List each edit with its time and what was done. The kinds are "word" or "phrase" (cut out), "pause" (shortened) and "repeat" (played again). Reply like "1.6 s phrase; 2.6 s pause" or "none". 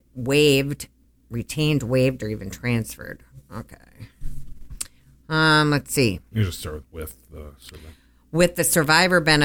none

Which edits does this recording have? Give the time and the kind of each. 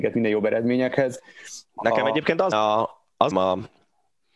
1.7 s pause; 2.5 s word; 3.3 s phrase

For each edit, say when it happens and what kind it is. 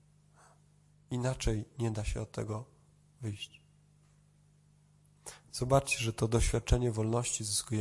none

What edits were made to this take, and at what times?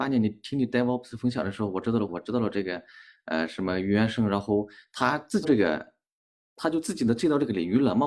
2.1 s word; 5.4 s word

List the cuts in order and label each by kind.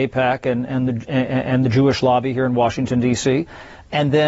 none

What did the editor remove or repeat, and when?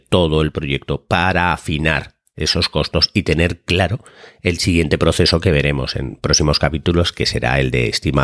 none

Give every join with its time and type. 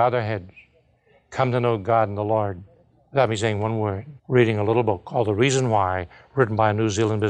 4.2 s pause

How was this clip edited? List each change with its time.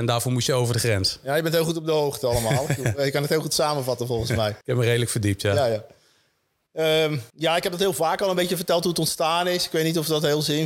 4.6 s pause; 7.3 s pause

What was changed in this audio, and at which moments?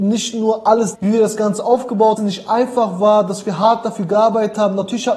0.9 s phrase; 2.2 s phrase

